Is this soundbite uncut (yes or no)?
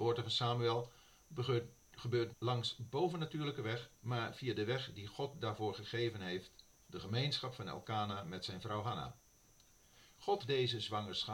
no